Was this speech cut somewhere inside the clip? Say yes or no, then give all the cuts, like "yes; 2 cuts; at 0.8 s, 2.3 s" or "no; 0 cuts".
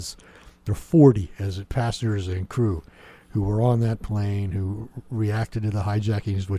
yes; 1 cut; at 1.7 s